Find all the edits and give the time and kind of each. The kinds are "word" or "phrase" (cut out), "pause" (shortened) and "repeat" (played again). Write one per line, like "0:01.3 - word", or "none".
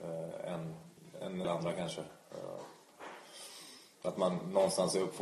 0:01.4 - word